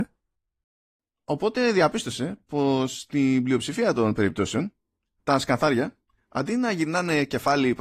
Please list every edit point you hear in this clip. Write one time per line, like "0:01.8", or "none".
none